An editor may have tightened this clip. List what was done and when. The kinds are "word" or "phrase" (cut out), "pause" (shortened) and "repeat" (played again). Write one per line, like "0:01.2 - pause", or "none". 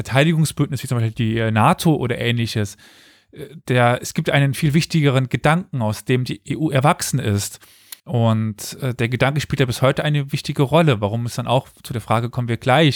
0:08.0 - pause